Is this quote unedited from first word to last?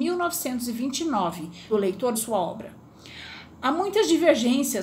no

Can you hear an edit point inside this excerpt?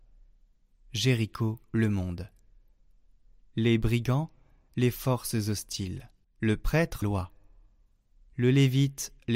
yes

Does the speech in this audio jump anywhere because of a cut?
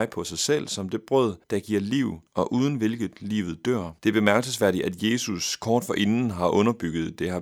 yes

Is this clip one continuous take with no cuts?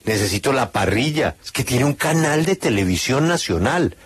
no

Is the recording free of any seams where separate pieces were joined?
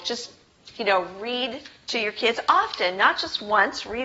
yes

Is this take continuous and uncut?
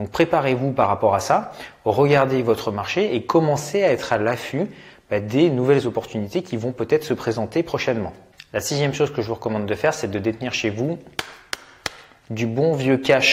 yes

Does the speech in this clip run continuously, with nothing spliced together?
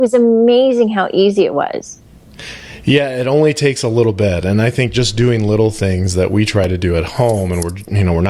yes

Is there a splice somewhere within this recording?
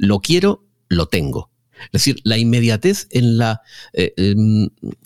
no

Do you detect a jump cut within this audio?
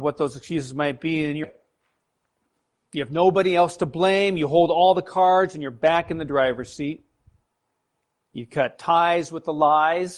yes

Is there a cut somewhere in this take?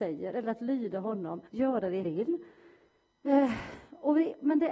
yes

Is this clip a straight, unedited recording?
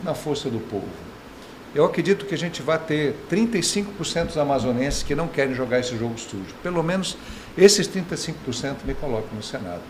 yes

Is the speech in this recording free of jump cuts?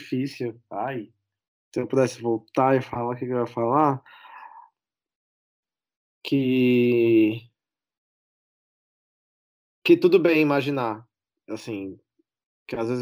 yes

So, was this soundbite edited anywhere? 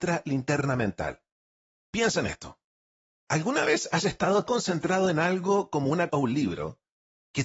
yes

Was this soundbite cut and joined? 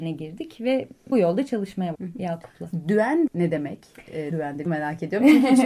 yes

